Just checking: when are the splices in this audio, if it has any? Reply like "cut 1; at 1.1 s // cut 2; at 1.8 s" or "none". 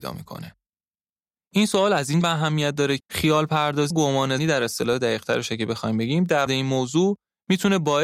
cut 1; at 2.2 s // cut 2; at 3.0 s // cut 3; at 3.9 s // cut 4; at 4.4 s // cut 5; at 6.5 s